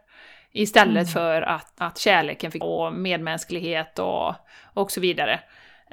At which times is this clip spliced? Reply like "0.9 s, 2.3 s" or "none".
1.8 s, 2.6 s